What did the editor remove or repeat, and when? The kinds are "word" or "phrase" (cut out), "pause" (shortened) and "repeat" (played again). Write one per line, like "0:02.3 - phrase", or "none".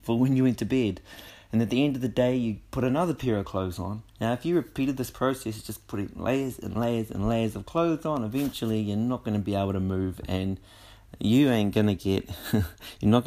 0:04.1 - pause